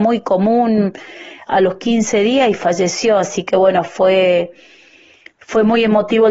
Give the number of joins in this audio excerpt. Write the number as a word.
zero